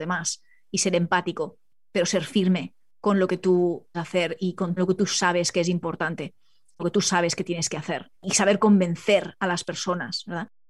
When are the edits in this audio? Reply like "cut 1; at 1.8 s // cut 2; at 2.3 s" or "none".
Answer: cut 1; at 3.9 s // cut 2; at 4.8 s // cut 3; at 6.8 s // cut 4; at 8.1 s